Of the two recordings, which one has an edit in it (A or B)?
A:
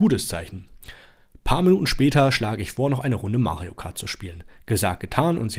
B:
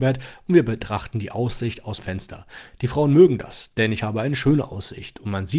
B